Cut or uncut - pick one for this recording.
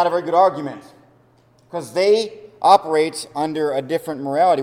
uncut